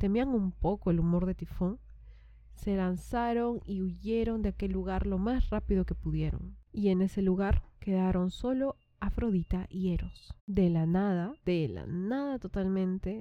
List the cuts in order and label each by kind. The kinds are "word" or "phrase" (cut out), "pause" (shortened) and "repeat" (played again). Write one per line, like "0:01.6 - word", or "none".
0:06.7 - pause
0:10.4 - pause
0:11.4 - pause